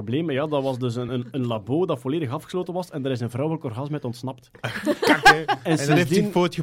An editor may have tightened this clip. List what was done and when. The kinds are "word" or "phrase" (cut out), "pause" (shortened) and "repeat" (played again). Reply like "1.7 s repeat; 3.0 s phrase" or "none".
none